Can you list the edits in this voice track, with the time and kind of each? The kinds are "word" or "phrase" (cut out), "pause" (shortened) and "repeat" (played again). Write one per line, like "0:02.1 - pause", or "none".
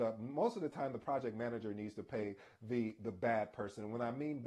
none